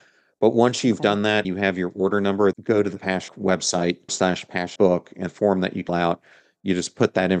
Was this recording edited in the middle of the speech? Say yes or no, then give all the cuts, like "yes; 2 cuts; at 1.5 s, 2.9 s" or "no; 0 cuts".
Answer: yes; 7 cuts; at 1.4 s, 2.5 s, 3.3 s, 4.1 s, 4.8 s, 5.3 s, 5.9 s